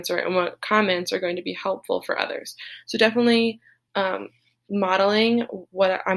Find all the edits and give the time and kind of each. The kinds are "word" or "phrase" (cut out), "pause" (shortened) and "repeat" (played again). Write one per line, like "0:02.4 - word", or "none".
none